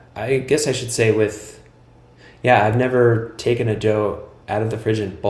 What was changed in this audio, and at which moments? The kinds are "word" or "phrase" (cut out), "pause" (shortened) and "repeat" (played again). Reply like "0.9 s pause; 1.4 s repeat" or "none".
none